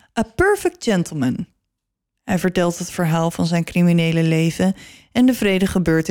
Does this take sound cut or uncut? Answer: uncut